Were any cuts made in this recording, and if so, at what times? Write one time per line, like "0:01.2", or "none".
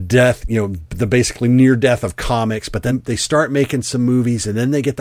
0:02.9